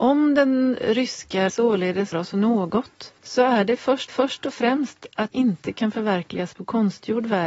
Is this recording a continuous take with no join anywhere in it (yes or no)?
no